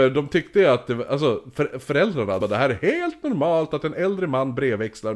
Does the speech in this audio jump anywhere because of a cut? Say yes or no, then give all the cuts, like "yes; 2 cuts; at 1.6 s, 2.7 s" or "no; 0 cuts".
yes; 1 cut; at 2.4 s